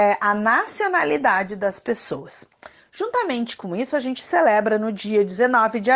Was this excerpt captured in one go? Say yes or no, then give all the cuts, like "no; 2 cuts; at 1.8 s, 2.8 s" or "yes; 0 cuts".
yes; 0 cuts